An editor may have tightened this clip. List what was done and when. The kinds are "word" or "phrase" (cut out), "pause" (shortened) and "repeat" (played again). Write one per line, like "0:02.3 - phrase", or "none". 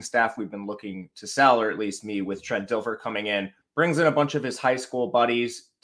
0:03.6 - pause